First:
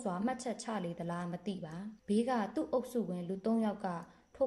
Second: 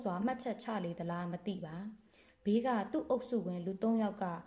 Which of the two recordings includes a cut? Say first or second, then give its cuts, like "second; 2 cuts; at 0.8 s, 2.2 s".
first; 1 cut; at 2.0 s